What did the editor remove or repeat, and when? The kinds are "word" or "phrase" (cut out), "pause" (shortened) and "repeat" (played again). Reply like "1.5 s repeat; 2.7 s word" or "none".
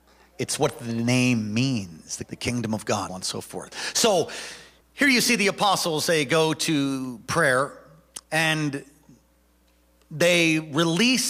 2.3 s phrase; 3.1 s word; 4.8 s pause; 8.2 s pause